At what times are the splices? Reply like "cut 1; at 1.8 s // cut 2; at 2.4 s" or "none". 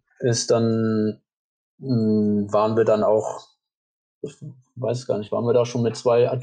none

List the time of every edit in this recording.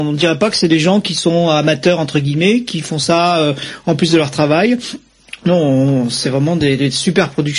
none

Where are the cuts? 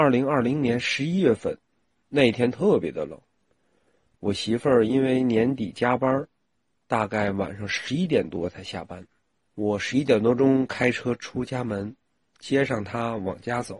none

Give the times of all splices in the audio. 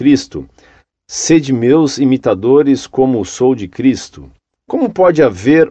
none

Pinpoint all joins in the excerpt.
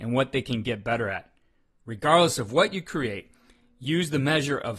none

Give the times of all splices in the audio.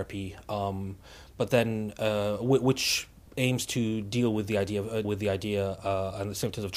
cut 1; at 3.3 s // cut 2; at 5.0 s

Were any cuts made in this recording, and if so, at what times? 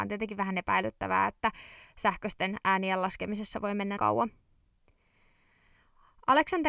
cut 1; at 4.0 s

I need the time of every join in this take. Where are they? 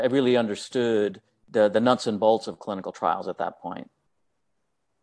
cut 1; at 1.3 s

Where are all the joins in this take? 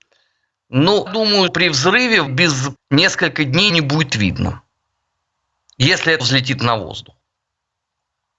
cut 1; at 1.1 s // cut 2; at 1.5 s // cut 3; at 2.3 s // cut 4; at 2.8 s // cut 5; at 3.7 s // cut 6; at 6.2 s

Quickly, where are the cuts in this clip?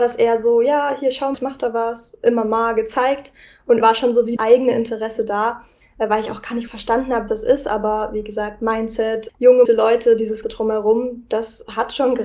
cut 1; at 1.3 s // cut 2; at 3.8 s // cut 3; at 4.4 s // cut 4; at 6.7 s // cut 5; at 7.3 s // cut 6; at 9.6 s // cut 7; at 10.4 s

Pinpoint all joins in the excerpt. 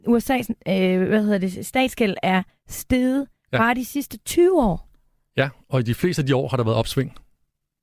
none

